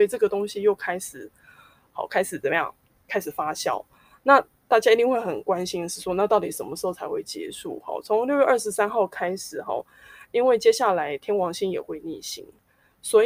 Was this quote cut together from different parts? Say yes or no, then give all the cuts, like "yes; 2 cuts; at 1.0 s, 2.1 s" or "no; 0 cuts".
no; 0 cuts